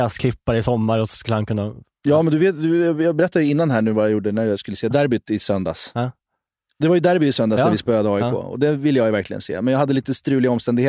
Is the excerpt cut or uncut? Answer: uncut